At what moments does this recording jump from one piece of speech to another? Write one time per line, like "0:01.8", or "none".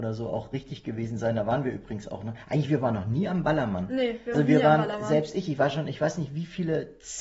0:04.3